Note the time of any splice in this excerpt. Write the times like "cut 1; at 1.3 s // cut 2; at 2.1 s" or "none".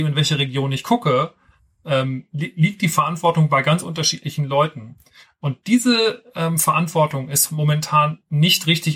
none